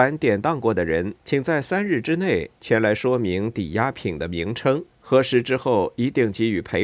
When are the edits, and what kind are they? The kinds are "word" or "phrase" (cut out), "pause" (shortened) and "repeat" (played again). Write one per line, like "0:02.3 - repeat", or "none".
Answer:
0:01.2 - pause
0:04.9 - pause